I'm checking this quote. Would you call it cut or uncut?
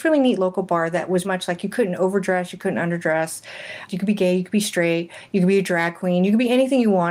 cut